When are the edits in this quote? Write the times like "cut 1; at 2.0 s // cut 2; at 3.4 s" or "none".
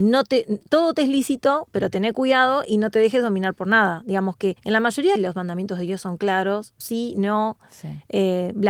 cut 1; at 4.6 s // cut 2; at 5.2 s // cut 3; at 6.8 s